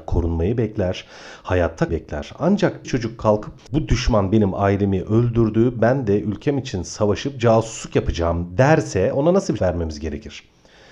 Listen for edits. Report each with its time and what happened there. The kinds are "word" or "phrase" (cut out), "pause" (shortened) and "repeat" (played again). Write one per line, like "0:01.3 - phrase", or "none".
0:01.9 - word
0:02.8 - word
0:03.6 - word
0:09.6 - word